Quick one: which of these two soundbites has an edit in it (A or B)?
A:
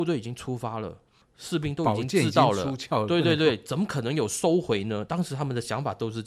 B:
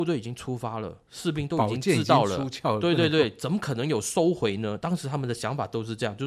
B